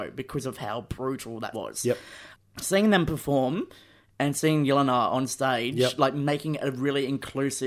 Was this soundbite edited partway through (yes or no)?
yes